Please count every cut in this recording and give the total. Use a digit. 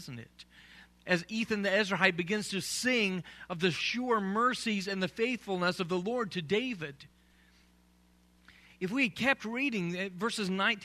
0